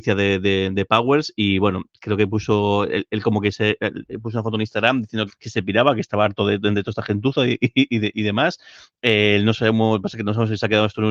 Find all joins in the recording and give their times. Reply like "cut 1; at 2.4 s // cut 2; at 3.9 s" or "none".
cut 1; at 5.3 s